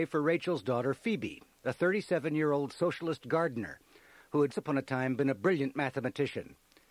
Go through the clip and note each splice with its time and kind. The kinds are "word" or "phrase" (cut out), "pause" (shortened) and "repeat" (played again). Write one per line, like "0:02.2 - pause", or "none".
0:03.2 - word
0:04.5 - word